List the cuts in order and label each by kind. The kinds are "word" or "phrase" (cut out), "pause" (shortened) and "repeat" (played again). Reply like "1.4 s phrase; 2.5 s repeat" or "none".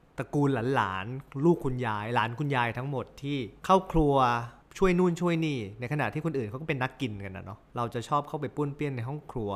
3.6 s pause